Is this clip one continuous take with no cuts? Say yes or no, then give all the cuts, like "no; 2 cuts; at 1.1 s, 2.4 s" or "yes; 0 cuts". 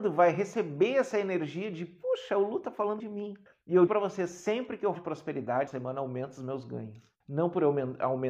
no; 6 cuts; at 3.0 s, 3.5 s, 3.9 s, 5.0 s, 5.7 s, 7.2 s